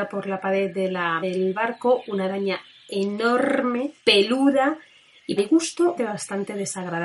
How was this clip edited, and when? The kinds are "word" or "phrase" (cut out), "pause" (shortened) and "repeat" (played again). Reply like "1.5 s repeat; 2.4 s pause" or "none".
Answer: 1.2 s word; 4.0 s pause; 5.4 s word; 6.0 s word